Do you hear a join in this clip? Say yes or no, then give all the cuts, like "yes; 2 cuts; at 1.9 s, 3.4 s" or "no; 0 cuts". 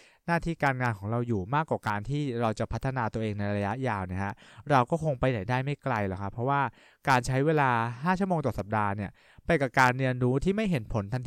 no; 0 cuts